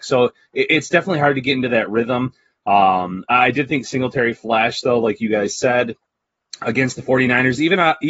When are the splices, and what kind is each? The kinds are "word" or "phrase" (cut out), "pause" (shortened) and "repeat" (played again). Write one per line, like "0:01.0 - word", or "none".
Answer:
none